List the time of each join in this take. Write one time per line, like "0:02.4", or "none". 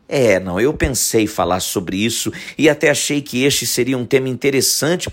none